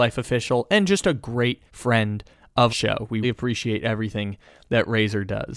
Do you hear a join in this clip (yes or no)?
yes